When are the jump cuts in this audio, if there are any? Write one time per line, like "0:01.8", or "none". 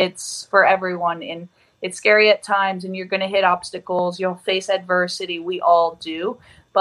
none